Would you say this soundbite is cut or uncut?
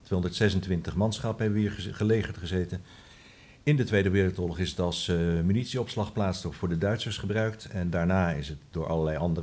uncut